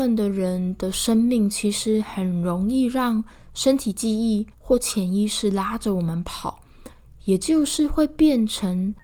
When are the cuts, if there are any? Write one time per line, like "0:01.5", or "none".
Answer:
0:04.5